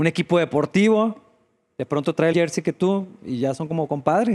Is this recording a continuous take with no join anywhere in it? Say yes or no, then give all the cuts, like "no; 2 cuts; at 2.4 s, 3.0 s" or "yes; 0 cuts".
no; 1 cut; at 2.3 s